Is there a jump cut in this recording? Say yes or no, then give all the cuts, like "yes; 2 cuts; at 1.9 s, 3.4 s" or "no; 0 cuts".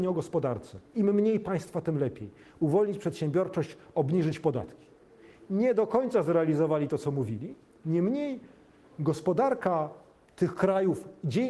no; 0 cuts